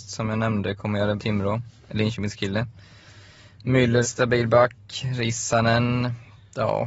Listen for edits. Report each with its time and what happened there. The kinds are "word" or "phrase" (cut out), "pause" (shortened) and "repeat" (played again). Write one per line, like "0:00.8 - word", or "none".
0:01.2 - phrase
0:04.0 - word